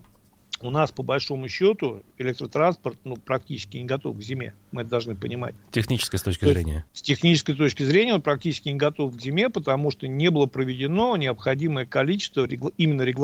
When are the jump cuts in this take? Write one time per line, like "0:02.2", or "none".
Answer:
0:06.9